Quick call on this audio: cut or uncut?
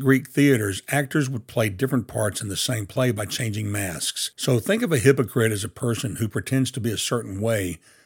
uncut